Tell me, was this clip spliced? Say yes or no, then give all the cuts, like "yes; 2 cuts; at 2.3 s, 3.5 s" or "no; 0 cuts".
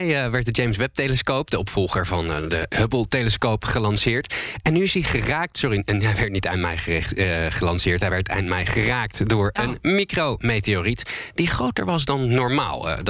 no; 0 cuts